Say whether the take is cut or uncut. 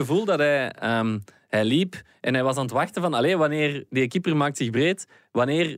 uncut